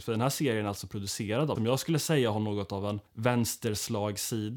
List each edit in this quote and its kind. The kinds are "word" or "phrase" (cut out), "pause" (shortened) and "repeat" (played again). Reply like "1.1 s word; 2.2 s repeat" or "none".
1.5 s word; 3.1 s pause